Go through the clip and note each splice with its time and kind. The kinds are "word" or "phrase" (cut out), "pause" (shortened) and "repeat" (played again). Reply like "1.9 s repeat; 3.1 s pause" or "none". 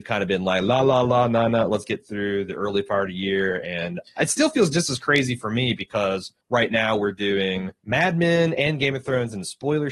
6.4 s pause; 7.8 s pause

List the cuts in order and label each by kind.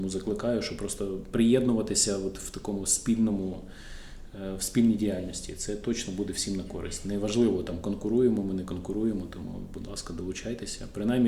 none

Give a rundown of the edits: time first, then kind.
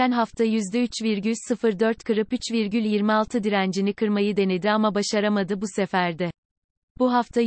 none

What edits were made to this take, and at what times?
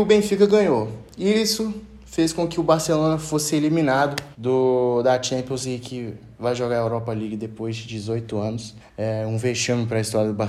4.3 s pause; 8.8 s pause

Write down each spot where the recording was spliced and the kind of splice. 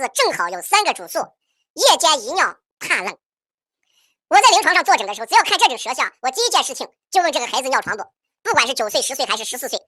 2.7 s pause

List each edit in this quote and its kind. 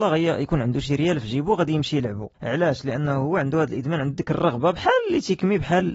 2.3 s pause

